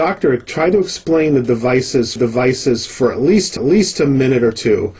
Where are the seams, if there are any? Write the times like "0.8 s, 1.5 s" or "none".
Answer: 2.2 s, 3.6 s